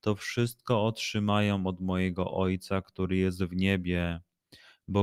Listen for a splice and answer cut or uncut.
uncut